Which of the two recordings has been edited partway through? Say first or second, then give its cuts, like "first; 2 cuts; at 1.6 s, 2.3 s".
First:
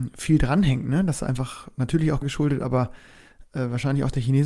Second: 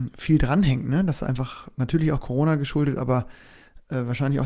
first; 1 cut; at 2.2 s